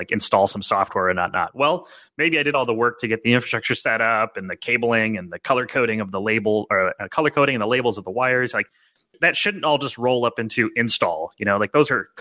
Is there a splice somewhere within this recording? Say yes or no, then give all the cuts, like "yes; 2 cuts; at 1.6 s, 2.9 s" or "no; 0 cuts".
no; 0 cuts